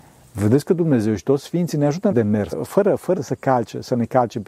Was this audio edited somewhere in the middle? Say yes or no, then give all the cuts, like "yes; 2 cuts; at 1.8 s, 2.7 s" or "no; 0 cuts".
yes; 3 cuts; at 2.1 s, 2.5 s, 3.2 s